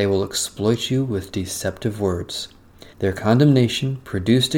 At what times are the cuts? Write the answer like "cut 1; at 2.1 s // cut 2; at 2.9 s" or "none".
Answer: cut 1; at 2.9 s